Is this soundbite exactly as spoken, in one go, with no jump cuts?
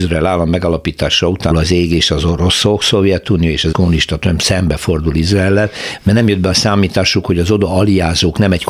no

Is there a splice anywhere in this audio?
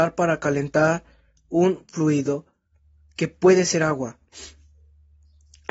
no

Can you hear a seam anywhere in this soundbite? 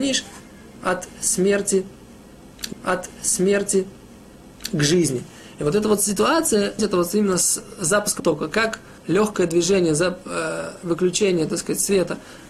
yes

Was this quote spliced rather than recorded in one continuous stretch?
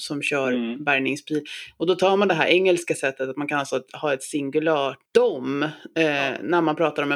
yes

